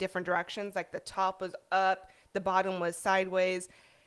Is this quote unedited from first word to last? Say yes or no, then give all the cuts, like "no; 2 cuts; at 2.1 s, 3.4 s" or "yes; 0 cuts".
yes; 0 cuts